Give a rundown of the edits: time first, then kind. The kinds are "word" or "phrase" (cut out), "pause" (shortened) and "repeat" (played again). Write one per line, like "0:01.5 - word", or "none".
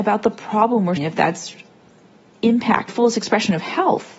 0:01.0 - word
0:02.9 - phrase